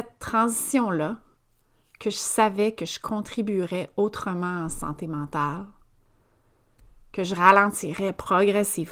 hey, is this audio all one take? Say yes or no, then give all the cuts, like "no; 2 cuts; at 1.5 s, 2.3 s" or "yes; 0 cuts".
yes; 0 cuts